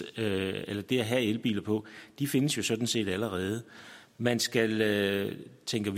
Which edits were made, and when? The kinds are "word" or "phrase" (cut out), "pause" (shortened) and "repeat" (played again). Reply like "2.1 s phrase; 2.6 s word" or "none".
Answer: none